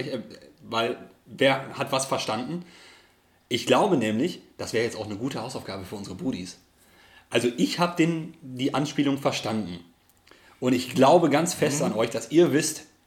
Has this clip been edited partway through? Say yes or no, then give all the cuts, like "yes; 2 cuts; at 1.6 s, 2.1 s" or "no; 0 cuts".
no; 0 cuts